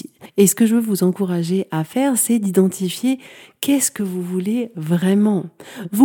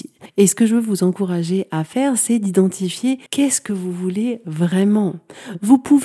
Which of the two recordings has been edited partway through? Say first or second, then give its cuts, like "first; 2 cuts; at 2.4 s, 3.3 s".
second; 1 cut; at 3.3 s